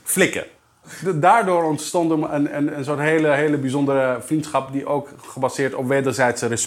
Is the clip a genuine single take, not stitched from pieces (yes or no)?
yes